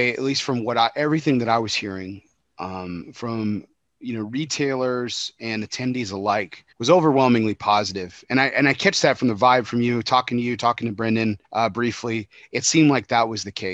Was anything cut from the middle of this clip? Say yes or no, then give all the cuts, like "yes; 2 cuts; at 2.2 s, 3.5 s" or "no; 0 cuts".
yes; 2 cuts; at 6.7 s, 11.4 s